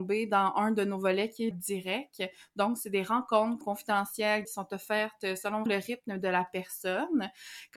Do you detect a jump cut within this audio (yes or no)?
yes